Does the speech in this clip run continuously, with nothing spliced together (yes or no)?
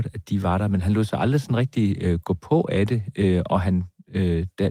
yes